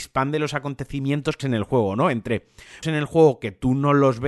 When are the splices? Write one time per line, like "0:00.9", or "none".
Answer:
0:01.4
0:02.8

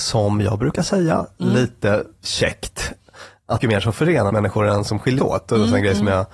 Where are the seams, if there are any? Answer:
0:03.6
0:04.3
0:05.2

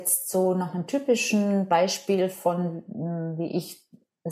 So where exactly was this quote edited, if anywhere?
none

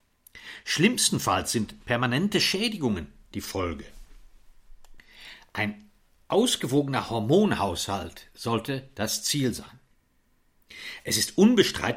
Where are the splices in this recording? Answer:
none

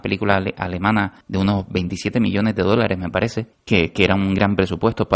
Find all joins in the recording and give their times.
0:01.2
0:03.5

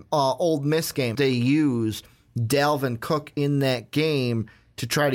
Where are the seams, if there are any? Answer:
0:01.1

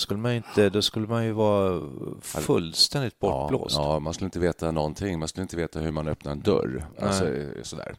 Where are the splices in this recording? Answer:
none

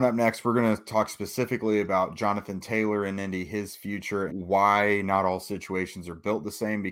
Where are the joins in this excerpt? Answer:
0:04.3

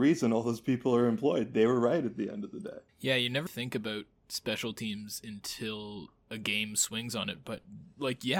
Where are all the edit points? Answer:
0:02.9
0:03.5

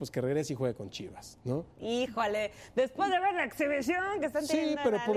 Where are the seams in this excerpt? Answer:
0:01.7

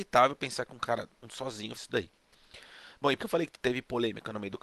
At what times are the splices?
0:01.7
0:03.2

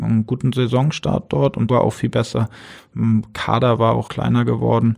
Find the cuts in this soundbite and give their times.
0:01.7
0:04.1

